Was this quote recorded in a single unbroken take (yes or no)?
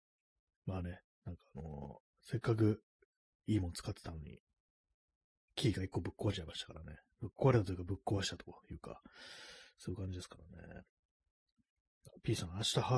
yes